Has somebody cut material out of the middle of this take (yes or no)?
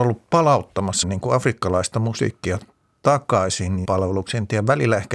yes